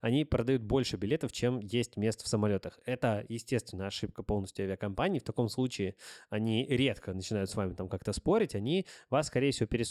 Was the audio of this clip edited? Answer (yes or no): no